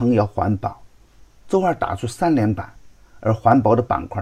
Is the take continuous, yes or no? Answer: yes